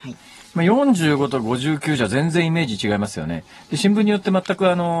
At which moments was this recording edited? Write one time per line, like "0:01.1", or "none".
none